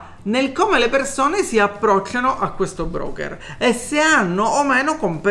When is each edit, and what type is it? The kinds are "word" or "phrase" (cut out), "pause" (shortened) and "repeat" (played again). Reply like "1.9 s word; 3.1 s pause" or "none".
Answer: none